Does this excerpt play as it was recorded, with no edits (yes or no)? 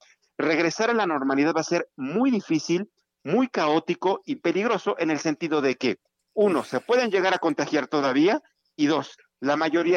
yes